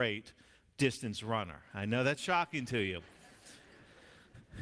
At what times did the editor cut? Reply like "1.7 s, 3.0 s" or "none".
none

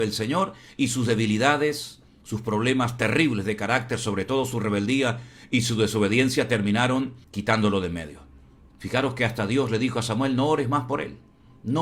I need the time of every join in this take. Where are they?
7.2 s

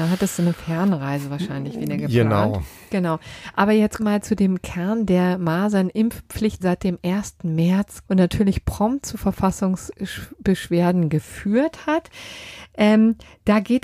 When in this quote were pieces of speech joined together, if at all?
4.0 s, 6.6 s, 8.1 s

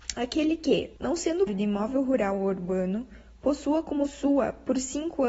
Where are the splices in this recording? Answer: 1.0 s, 1.5 s

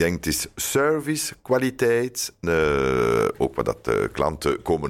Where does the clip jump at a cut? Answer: 2.4 s

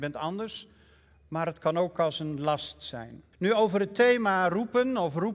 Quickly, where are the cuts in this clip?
3.3 s

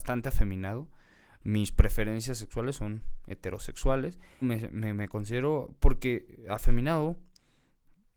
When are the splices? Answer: 4.4 s

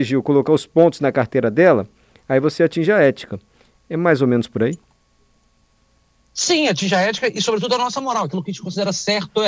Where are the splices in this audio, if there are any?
none

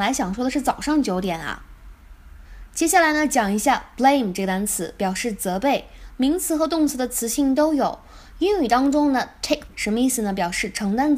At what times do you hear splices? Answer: 9.7 s

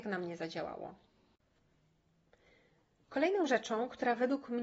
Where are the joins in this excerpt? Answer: none

